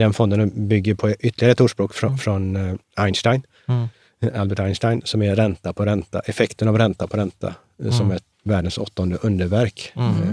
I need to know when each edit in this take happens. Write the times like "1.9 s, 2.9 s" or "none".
2.8 s, 8.3 s